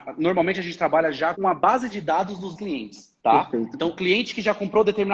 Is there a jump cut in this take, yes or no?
yes